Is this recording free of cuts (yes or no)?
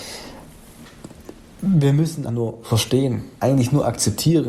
no